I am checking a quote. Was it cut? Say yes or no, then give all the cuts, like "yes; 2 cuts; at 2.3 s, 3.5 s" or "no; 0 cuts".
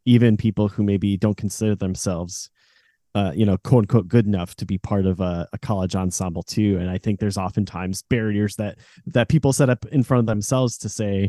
no; 0 cuts